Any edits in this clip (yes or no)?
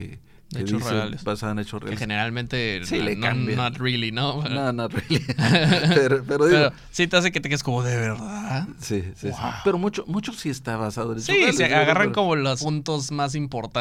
no